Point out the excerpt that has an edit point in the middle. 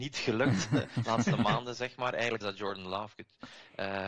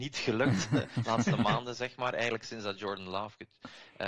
first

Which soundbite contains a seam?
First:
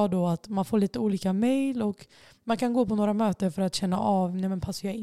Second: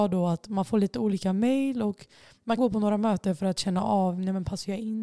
second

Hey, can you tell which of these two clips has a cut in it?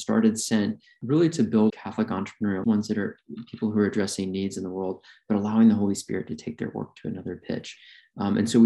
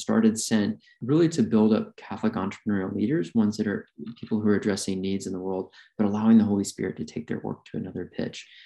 first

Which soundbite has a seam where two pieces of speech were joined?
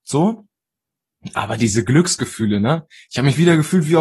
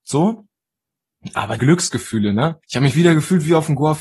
second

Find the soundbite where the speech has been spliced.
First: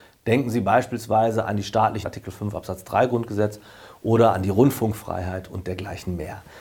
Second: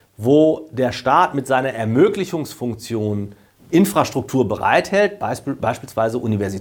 first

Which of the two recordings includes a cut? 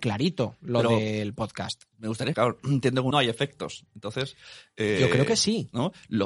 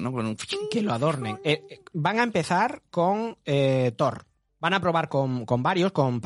first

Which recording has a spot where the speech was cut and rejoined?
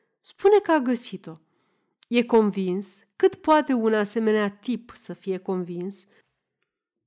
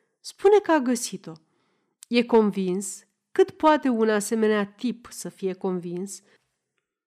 first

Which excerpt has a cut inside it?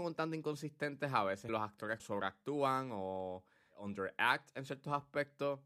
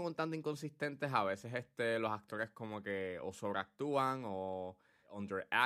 first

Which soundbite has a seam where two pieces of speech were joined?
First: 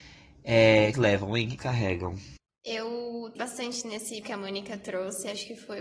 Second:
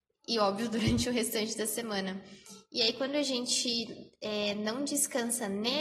first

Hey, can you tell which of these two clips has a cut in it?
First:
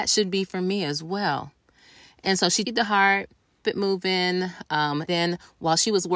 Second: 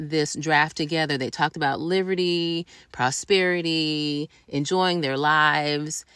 first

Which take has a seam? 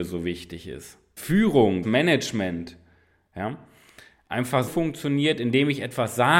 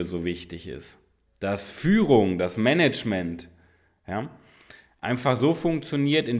first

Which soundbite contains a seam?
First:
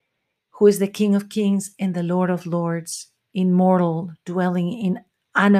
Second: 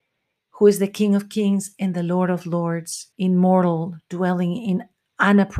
second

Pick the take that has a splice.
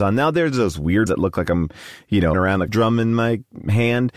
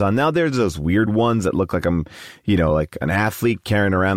first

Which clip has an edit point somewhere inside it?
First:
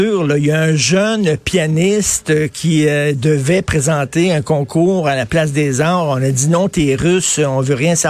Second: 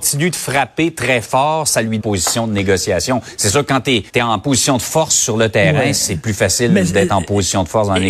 second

